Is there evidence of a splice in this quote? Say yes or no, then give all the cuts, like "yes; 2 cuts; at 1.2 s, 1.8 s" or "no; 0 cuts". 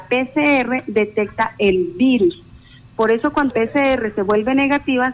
yes; 1 cut; at 3.5 s